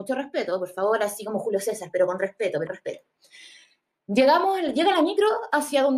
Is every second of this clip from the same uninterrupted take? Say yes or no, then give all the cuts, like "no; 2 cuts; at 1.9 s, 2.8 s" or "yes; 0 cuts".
no; 1 cut; at 2.7 s